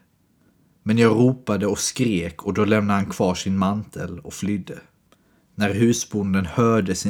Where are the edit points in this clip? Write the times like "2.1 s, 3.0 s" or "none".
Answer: none